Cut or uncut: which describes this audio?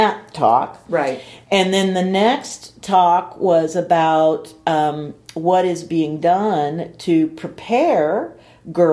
uncut